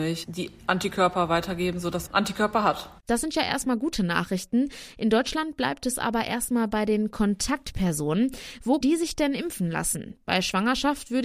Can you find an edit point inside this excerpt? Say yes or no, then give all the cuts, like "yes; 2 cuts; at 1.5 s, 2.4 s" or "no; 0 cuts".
yes; 3 cuts; at 2.1 s, 3.0 s, 8.8 s